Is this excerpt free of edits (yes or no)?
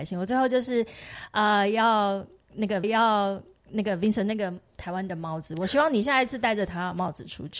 no